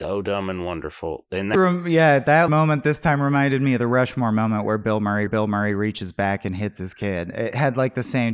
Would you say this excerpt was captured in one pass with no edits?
no; 3 cuts; at 1.5 s, 2.5 s, 5.3 s

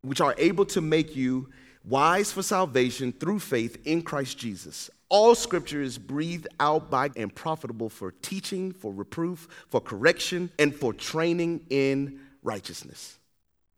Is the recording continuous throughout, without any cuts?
no; 2 cuts; at 7.1 s, 10.5 s

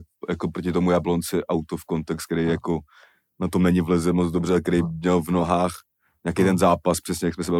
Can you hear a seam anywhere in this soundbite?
no; 0 cuts

